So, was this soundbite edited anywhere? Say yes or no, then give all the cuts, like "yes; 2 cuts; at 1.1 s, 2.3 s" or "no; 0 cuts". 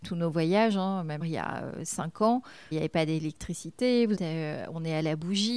yes; 3 cuts; at 1.2 s, 2.7 s, 4.2 s